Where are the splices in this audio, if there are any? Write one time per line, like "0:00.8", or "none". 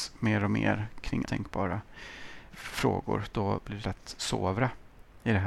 0:01.2
0:02.5
0:03.8